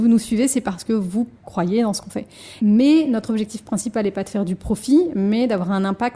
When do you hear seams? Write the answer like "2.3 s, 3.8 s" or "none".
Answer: 1.4 s